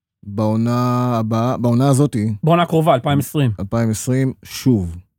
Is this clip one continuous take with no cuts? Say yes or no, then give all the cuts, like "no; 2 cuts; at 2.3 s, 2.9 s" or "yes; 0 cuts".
yes; 0 cuts